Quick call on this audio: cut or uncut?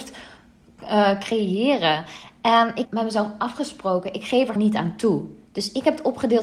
cut